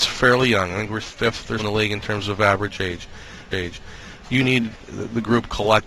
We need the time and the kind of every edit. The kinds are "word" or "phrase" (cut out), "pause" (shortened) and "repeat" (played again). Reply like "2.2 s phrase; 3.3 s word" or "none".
1.0 s word; 1.6 s word; 3.5 s repeat